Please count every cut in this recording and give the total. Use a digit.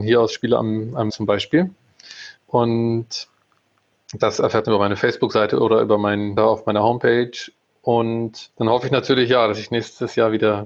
5